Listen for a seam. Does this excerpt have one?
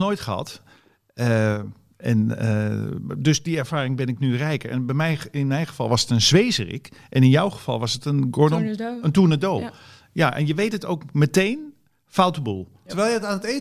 no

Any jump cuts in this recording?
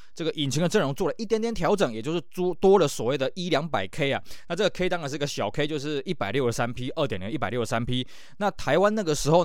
no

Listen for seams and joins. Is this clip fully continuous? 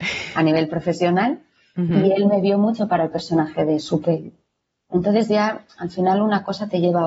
yes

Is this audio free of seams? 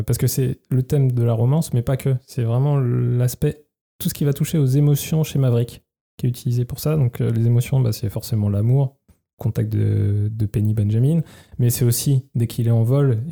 yes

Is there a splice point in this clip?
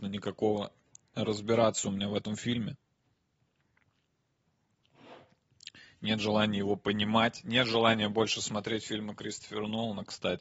no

